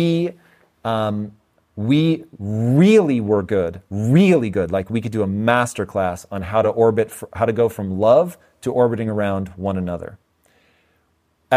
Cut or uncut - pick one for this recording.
uncut